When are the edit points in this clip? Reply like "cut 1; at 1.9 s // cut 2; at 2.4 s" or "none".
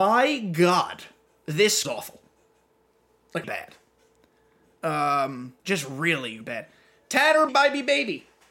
cut 1; at 1.8 s // cut 2; at 3.4 s // cut 3; at 5.6 s // cut 4; at 6.4 s // cut 5; at 7.5 s